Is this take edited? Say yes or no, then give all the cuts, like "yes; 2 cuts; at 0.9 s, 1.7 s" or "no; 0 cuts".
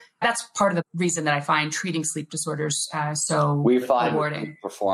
no; 0 cuts